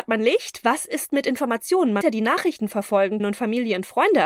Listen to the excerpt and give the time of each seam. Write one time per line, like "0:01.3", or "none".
0:02.0
0:03.2